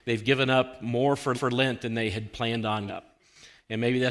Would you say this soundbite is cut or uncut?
cut